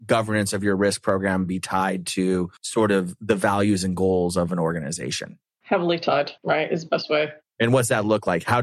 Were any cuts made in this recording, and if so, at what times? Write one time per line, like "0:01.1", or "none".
0:02.6
0:06.4